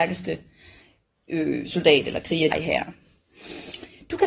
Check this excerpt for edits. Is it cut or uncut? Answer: cut